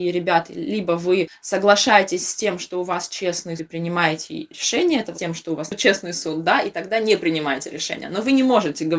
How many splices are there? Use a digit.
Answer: 2